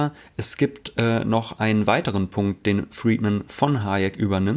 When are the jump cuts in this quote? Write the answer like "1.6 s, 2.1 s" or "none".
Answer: none